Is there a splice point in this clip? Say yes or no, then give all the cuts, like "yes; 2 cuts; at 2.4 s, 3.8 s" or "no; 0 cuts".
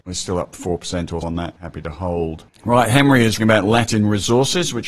yes; 2 cuts; at 1.2 s, 3.4 s